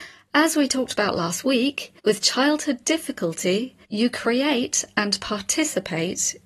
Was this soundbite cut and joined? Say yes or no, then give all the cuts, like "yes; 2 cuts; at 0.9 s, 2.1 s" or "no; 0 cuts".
yes; 2 cuts; at 2.0 s, 3.8 s